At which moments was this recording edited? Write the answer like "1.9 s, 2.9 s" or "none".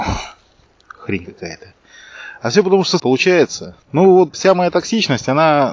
3.0 s, 3.8 s, 4.3 s